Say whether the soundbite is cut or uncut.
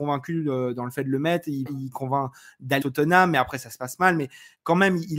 cut